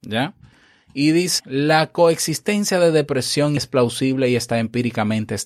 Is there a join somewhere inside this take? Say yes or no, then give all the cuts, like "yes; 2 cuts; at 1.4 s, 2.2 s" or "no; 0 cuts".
yes; 2 cuts; at 1.4 s, 3.6 s